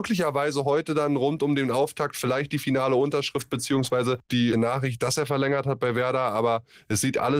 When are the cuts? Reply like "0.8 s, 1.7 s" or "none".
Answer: 4.5 s